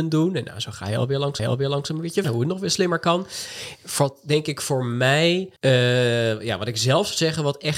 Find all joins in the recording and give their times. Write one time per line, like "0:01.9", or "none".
0:01.4
0:02.2
0:05.6